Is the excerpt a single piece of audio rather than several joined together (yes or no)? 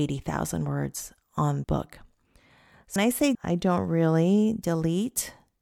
no